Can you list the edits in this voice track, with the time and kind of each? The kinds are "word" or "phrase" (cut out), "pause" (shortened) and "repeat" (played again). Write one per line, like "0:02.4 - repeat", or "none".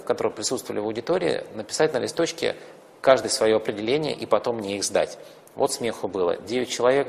none